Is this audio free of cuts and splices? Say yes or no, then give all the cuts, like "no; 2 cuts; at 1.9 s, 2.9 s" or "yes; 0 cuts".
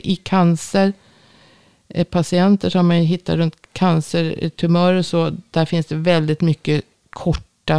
yes; 0 cuts